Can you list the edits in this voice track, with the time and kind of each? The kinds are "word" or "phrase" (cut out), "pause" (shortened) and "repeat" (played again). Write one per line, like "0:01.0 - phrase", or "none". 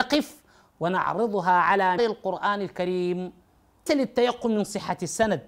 0:02.0 - word
0:03.9 - word